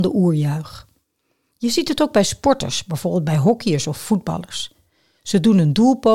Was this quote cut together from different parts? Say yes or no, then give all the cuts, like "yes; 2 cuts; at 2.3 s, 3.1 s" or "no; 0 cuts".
no; 0 cuts